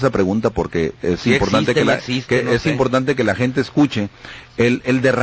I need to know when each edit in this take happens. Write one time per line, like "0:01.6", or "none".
none